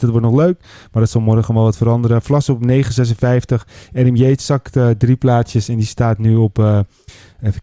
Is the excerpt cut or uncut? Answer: uncut